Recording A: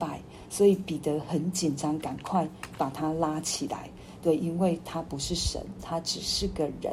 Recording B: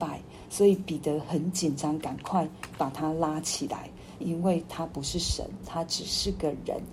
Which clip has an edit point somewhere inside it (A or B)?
B